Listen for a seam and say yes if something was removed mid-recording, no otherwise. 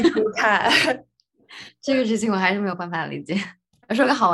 no